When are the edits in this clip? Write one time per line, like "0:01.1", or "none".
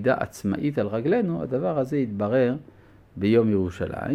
none